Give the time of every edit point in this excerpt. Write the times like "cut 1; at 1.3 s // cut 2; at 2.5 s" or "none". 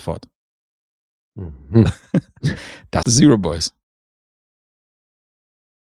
cut 1; at 3.0 s